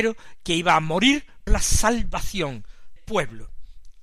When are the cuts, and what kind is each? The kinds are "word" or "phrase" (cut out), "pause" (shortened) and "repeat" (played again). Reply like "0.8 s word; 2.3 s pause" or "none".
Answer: 1.5 s word; 3.0 s word